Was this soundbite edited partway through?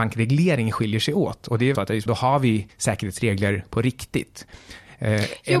yes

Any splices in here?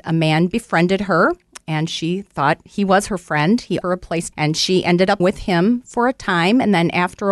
yes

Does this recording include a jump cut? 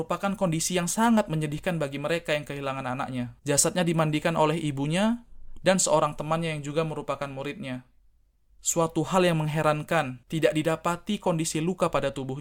yes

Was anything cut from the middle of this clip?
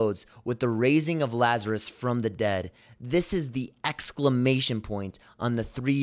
no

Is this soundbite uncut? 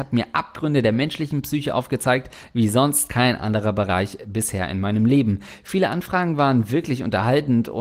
yes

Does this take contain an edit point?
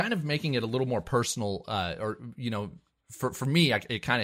no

